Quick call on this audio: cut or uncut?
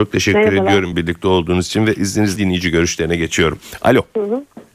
cut